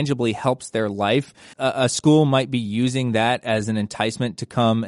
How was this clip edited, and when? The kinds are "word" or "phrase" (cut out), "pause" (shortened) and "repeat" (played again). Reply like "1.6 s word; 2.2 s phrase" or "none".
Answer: 1.5 s phrase